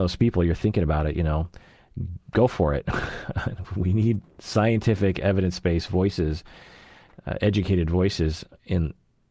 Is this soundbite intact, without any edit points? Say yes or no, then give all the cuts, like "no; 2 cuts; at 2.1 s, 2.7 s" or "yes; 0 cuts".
yes; 0 cuts